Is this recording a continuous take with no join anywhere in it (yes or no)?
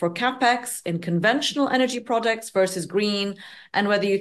yes